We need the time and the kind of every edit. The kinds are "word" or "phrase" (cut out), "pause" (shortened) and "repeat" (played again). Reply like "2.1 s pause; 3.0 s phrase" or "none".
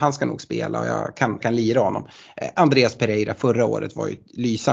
1.4 s word

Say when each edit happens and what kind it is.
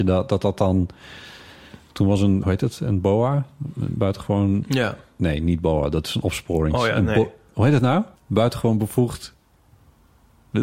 2.4 s word; 8.1 s pause

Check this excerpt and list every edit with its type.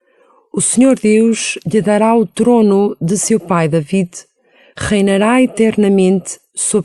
none

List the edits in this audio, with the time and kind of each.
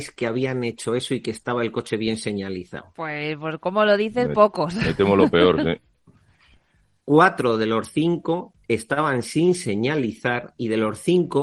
none

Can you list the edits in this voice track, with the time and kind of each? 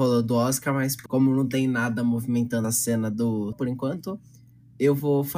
1.1 s word; 2.6 s word; 3.5 s word

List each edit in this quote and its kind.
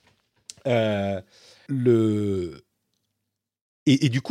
1.7 s word

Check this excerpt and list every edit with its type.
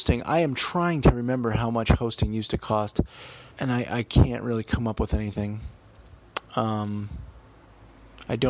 3.5 s pause

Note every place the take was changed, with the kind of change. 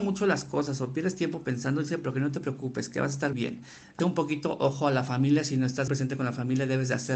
3.3 s word; 4.0 s word; 5.9 s word

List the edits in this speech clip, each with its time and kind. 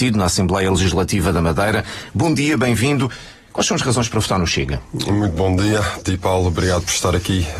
6.0 s word

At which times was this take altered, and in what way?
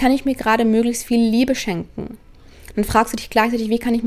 none

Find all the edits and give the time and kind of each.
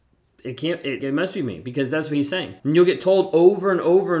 1.0 s word; 2.6 s pause

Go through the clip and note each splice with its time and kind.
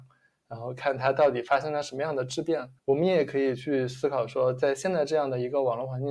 2.8 s pause

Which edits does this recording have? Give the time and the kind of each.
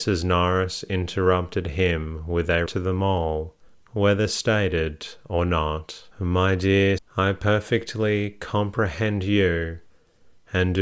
2.7 s word; 3.7 s pause; 6.1 s pause; 7.0 s phrase

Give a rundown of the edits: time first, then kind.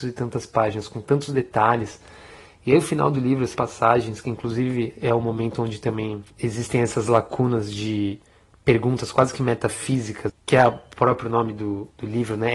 3.5 s word; 10.3 s word

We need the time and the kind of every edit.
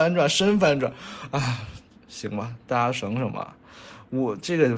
none

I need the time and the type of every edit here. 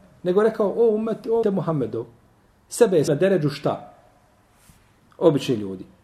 1.4 s word; 3.1 s word

